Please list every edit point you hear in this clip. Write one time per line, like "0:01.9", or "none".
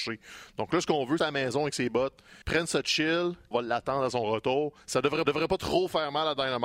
0:01.2
0:02.4
0:03.5
0:05.2